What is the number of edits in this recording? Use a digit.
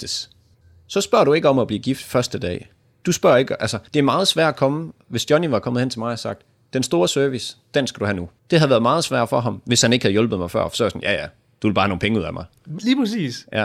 2